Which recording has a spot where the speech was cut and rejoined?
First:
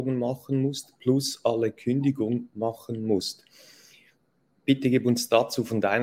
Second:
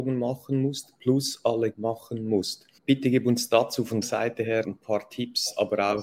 second; 4 cuts; at 1.7 s, 2.8 s, 4.0 s, 4.6 s

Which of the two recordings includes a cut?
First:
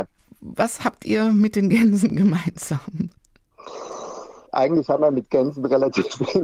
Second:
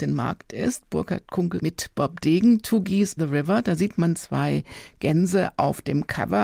second; 2 cuts; at 1.6 s, 3.2 s

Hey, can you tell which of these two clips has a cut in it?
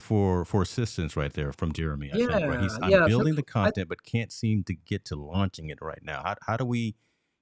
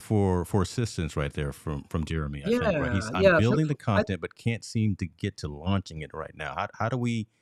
first; 1 cut; at 1.5 s

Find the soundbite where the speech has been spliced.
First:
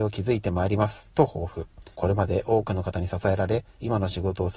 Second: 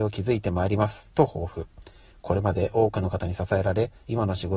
first; 1 cut; at 1.9 s

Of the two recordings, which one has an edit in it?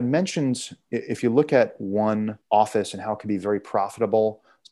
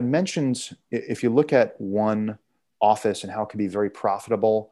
first; 1 cut; at 2.4 s

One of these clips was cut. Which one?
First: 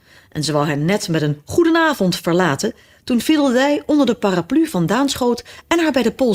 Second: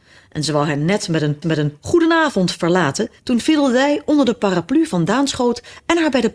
second; 2 cuts; at 1.4 s, 3.2 s

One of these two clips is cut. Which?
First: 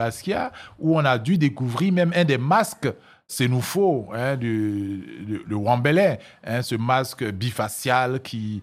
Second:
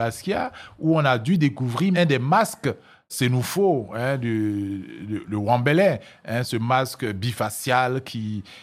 second; 1 cut; at 1.9 s

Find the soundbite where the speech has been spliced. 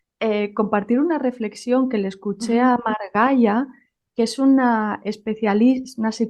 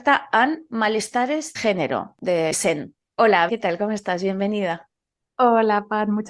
second; 3 cuts; at 1.5 s, 2.5 s, 3.5 s

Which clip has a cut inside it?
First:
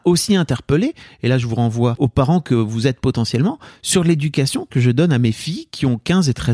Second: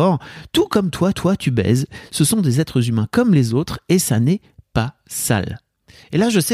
second; 1 cut; at 1.1 s

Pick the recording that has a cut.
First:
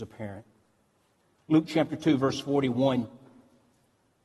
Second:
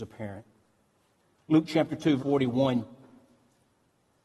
second; 1 cut; at 2.2 s

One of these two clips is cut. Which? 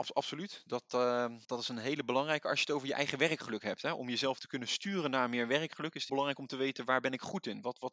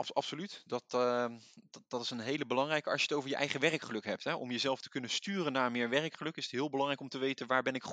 first; 2 cuts; at 1.4 s, 6.1 s

